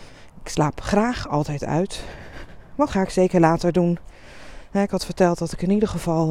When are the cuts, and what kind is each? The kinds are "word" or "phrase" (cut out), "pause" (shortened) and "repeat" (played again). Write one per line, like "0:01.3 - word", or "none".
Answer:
0:02.9 - phrase